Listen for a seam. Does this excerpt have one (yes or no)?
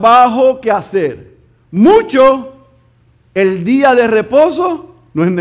no